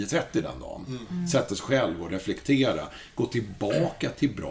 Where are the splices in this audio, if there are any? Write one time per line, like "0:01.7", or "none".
none